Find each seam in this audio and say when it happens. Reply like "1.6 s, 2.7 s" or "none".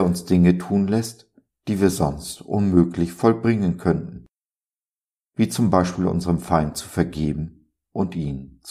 none

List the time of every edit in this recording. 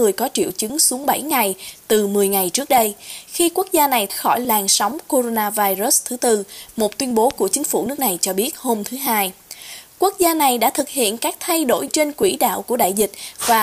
4.1 s, 11.9 s

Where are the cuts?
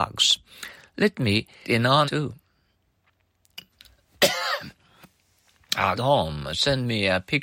1.6 s, 2.1 s, 6.0 s

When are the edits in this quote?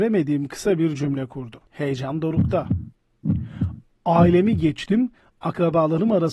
1.7 s

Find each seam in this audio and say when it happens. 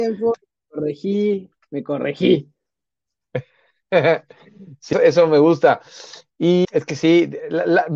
4.9 s, 6.6 s

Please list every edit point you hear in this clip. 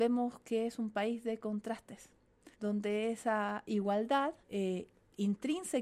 2.5 s, 4.4 s

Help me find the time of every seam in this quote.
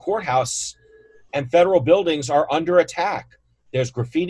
none

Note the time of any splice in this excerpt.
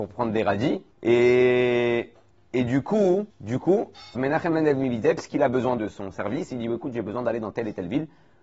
0.9 s, 3.3 s, 4.2 s, 5.8 s

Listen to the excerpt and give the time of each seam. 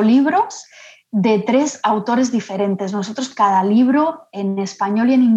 3.3 s

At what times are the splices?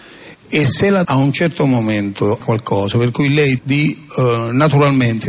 1.0 s, 2.4 s, 3.6 s

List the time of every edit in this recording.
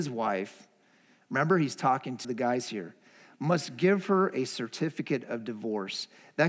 2.2 s

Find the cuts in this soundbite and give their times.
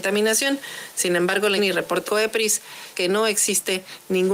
1.6 s, 2.1 s, 2.9 s

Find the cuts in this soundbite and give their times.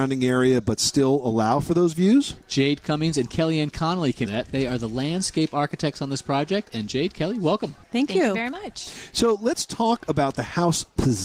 4.3 s, 7.8 s

